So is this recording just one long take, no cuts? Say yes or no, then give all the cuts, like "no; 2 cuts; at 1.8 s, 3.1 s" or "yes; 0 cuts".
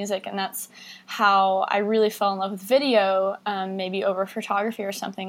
yes; 0 cuts